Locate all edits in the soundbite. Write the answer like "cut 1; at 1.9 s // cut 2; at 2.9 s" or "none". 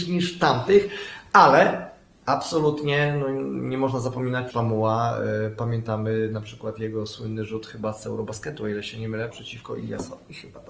cut 1; at 4.5 s // cut 2; at 9.3 s